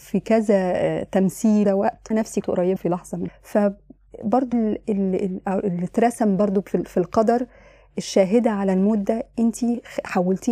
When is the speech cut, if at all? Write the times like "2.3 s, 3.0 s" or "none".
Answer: 1.7 s, 2.1 s, 2.4 s, 2.8 s, 3.3 s, 4.5 s